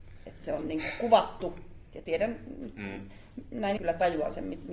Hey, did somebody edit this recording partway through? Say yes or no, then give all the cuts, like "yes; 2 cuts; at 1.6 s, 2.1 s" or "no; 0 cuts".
yes; 2 cuts; at 2.0 s, 3.8 s